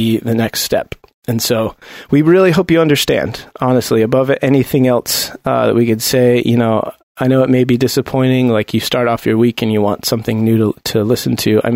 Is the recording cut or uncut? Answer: uncut